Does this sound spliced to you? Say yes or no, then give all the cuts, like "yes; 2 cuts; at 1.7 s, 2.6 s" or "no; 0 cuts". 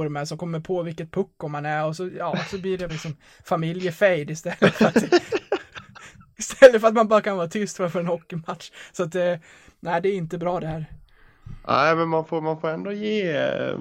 yes; 1 cut; at 2.9 s